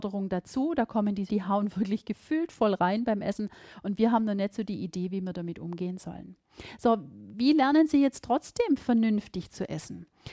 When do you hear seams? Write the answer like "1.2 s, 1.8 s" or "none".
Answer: 1.3 s